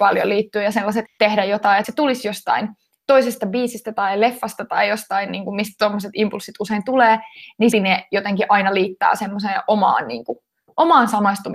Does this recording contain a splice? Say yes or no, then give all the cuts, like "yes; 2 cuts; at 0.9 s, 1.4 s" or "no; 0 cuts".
yes; 3 cuts; at 1.1 s, 1.8 s, 7.7 s